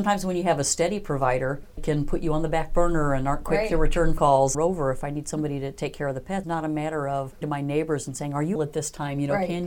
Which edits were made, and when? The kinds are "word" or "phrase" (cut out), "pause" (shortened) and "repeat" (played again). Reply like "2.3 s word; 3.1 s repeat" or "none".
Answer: 1.8 s word; 4.2 s word; 4.5 s phrase; 6.4 s word; 7.4 s word; 8.6 s word